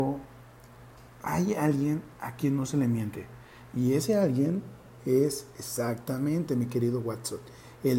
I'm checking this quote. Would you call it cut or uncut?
uncut